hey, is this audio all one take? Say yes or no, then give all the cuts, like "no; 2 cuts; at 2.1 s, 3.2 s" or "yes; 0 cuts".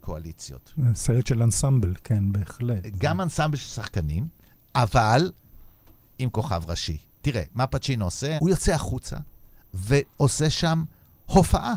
yes; 0 cuts